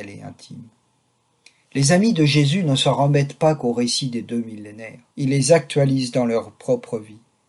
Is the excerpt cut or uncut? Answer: cut